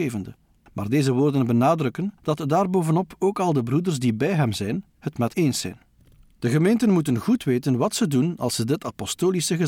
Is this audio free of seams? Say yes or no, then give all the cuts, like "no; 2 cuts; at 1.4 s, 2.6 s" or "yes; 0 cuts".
no; 1 cut; at 5.3 s